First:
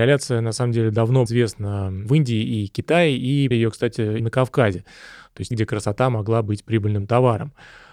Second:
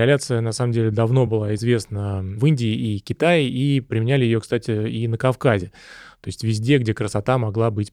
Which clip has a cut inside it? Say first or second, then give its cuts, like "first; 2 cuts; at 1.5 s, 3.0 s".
first; 4 cuts; at 1.3 s, 3.5 s, 4.2 s, 5.5 s